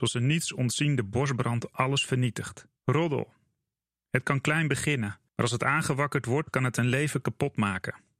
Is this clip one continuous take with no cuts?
no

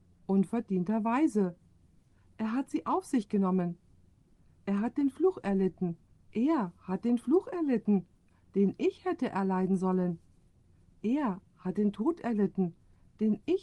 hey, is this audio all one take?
yes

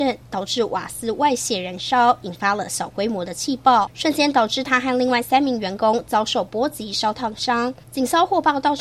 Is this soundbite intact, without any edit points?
yes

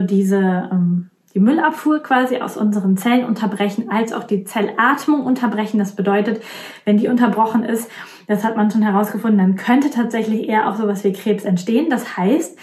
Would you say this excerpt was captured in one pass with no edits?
yes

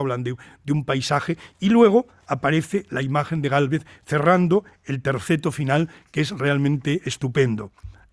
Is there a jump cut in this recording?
no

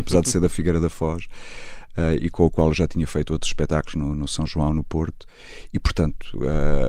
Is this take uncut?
yes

